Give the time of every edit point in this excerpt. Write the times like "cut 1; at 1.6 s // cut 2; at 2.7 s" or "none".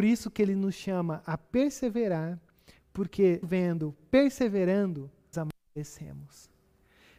cut 1; at 3.4 s // cut 2; at 5.3 s